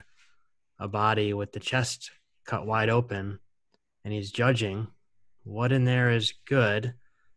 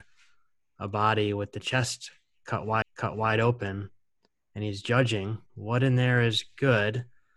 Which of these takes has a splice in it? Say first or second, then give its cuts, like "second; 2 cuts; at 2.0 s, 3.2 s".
second; 2 cuts; at 2.8 s, 5.5 s